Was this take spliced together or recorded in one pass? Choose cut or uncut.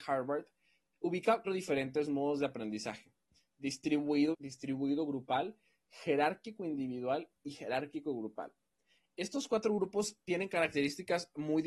cut